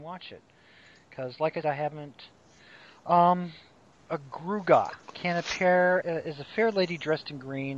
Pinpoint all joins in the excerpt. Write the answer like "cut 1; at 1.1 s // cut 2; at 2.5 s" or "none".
cut 1; at 1.6 s // cut 2; at 4.0 s // cut 3; at 5.0 s // cut 4; at 6.0 s

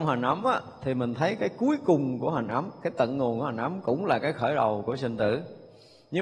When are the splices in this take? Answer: none

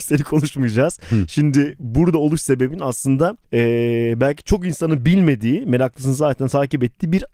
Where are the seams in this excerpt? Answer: cut 1; at 3.4 s

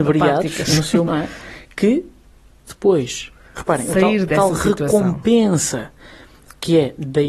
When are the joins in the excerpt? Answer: cut 1; at 1.1 s // cut 2; at 2.7 s // cut 3; at 4.3 s

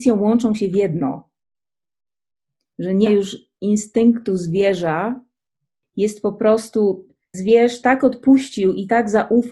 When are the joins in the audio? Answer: cut 1; at 3.1 s // cut 2; at 7.3 s

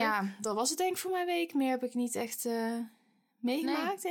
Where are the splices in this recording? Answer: none

